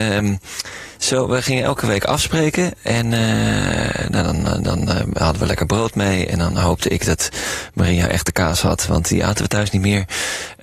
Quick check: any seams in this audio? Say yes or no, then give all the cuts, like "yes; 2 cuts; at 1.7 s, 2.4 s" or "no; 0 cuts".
no; 0 cuts